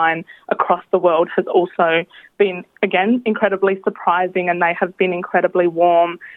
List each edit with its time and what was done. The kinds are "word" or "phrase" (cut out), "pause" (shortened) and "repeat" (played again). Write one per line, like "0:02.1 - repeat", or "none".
none

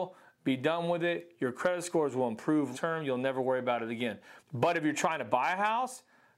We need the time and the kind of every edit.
0:02.7 - word
0:04.4 - pause

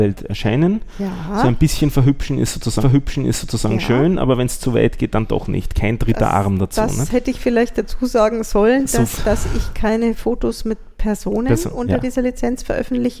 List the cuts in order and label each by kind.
0:02.8 - repeat
0:09.2 - word

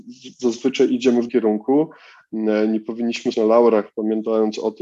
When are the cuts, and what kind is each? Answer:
0:01.3 - word
0:03.3 - word

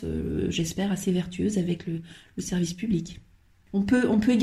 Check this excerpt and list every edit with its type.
none

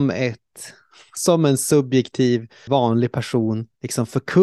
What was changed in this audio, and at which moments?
0:02.7 - word

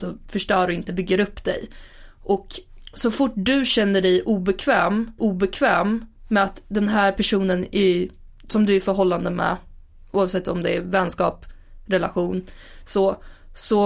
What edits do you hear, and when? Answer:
0:05.2 - repeat

